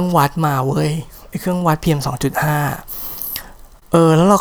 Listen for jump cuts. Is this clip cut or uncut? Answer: uncut